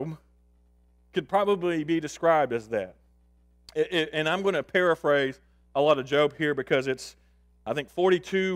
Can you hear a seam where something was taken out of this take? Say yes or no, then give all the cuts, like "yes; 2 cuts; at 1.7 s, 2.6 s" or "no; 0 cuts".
no; 0 cuts